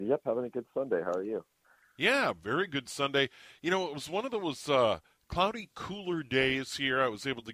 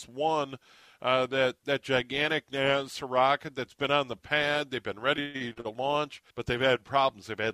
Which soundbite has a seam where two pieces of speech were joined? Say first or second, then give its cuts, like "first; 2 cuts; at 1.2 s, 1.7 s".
second; 1 cut; at 6.3 s